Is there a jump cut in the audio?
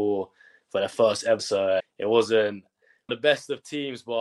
yes; 3 cuts; at 1.4 s, 1.8 s, 3.1 s

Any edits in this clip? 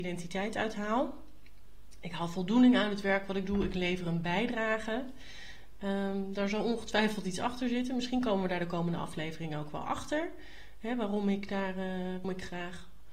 yes; 1 cut; at 12.2 s

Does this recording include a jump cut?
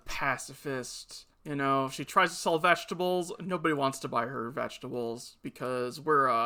yes; 1 cut; at 1.3 s

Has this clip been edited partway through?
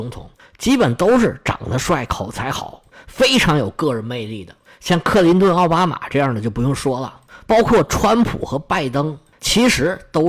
no; 0 cuts

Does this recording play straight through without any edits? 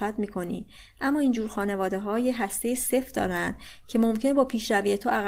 yes; 0 cuts

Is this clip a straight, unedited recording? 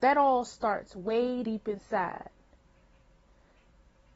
no; 1 cut; at 1.4 s

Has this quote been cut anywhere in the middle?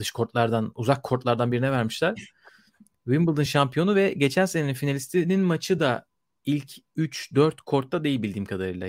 no; 0 cuts

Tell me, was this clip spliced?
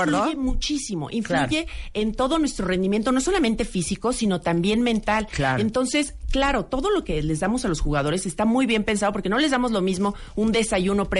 no; 0 cuts

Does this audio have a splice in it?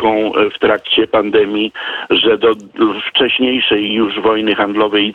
no; 0 cuts

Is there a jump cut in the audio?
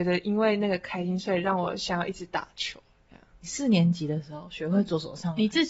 no; 0 cuts

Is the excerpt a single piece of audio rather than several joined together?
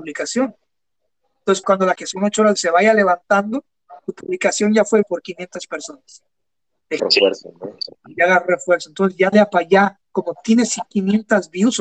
no; 7 cuts; at 1.6 s, 1.9 s, 2.6 s, 4.0 s, 5.0 s, 7.0 s, 9.3 s

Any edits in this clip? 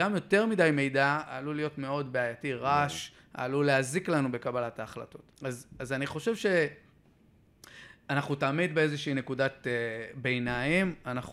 yes; 1 cut; at 5.3 s

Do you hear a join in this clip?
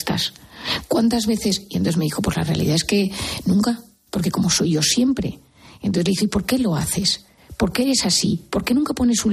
no; 0 cuts

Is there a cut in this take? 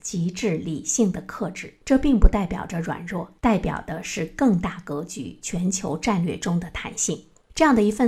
yes; 2 cuts; at 1.8 s, 3.4 s

